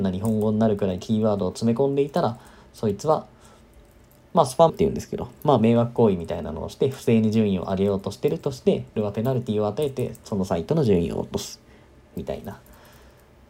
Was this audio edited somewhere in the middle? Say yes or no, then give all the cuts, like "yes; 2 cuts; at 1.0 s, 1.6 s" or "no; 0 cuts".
yes; 2 cuts; at 4.7 s, 9.0 s